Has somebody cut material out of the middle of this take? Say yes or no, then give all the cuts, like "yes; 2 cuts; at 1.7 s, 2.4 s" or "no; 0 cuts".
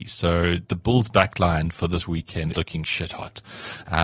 yes; 1 cut; at 2.5 s